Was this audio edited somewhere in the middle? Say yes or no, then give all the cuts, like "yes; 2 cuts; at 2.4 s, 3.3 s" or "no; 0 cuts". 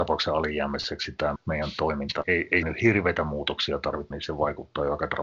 yes; 4 cuts; at 1.4 s, 2.2 s, 2.6 s, 4.1 s